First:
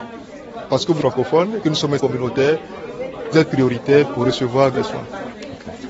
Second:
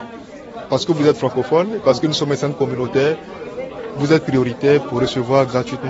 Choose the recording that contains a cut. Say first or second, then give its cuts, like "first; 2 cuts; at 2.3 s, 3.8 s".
first; 5 cuts; at 1.0 s, 1.6 s, 2.0 s, 3.3 s, 4.7 s